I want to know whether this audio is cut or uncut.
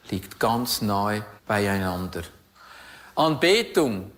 cut